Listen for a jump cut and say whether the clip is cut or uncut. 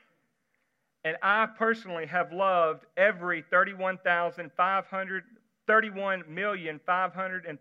uncut